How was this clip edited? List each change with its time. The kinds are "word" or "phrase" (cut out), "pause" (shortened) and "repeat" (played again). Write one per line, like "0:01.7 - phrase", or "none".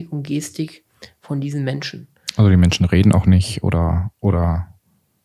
none